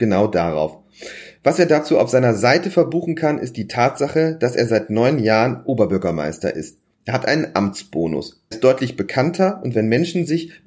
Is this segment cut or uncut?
cut